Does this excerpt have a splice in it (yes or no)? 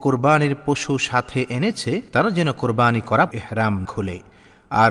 yes